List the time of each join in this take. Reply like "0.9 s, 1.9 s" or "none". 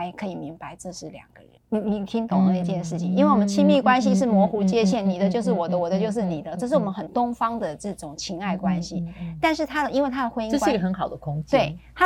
1.6 s